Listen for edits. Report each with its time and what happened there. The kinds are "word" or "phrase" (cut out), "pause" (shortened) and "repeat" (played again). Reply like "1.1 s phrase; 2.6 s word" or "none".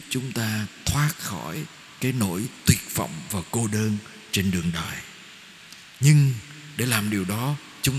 5.9 s pause